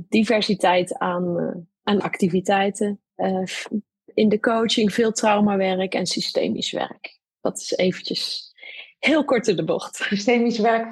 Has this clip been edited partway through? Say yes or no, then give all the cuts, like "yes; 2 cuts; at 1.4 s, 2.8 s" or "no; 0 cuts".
no; 0 cuts